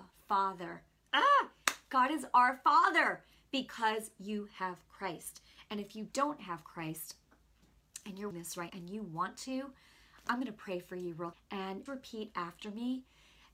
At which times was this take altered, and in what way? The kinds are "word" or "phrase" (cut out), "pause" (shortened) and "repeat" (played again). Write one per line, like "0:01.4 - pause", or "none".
0:08.3 - word
0:08.7 - word
0:11.3 - word
0:11.9 - word